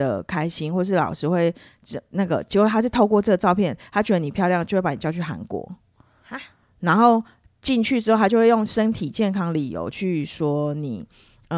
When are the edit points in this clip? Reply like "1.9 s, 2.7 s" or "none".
none